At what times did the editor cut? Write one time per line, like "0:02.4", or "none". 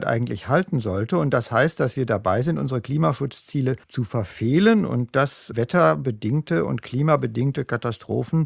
0:03.8